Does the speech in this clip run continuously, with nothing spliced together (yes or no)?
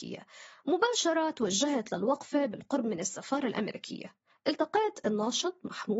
yes